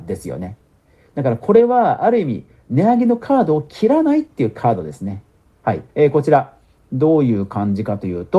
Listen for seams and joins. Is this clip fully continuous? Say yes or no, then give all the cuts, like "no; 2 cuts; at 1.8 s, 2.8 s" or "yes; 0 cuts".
no; 1 cut; at 5.9 s